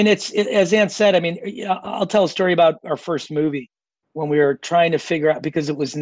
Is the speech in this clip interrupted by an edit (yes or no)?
no